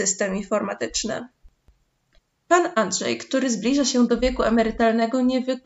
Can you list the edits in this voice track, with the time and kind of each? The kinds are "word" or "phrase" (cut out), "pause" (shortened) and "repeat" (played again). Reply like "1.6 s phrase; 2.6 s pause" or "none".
none